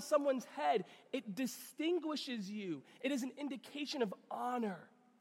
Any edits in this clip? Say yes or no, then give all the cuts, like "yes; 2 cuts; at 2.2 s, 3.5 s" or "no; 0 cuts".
no; 0 cuts